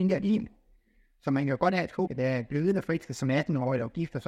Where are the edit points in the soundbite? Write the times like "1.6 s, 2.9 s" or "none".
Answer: 2.1 s